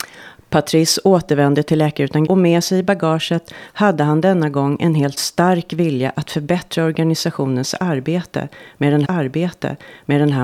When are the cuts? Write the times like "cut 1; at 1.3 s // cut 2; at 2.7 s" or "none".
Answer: cut 1; at 2.3 s // cut 2; at 5.2 s // cut 3; at 9.0 s